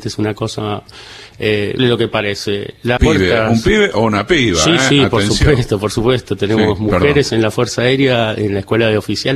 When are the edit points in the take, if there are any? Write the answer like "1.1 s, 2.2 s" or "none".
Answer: 1.8 s, 3.0 s